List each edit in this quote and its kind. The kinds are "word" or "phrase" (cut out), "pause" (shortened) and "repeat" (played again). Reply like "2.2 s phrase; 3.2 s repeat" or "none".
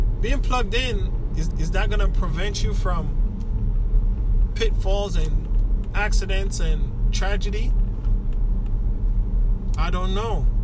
1.5 s repeat